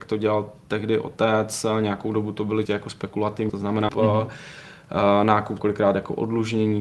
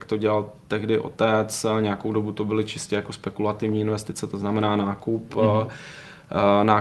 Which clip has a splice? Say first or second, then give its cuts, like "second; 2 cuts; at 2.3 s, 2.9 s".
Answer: first; 4 cuts; at 2.7 s, 3.5 s, 3.9 s, 5.6 s